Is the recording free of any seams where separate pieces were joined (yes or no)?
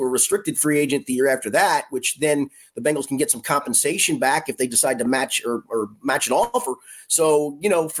no